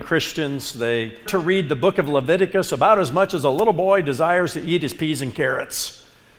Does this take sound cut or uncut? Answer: cut